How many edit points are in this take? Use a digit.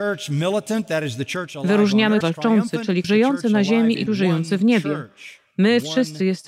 3